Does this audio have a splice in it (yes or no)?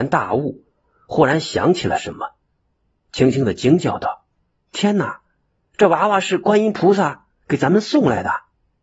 no